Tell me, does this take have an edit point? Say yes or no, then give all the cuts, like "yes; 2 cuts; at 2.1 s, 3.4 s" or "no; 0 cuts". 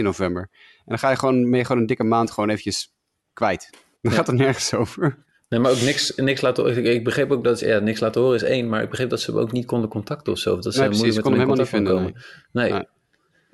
no; 0 cuts